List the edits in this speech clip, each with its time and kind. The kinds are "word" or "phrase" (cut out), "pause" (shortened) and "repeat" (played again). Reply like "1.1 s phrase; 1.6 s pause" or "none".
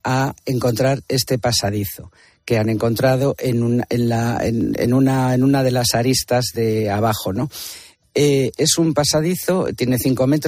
none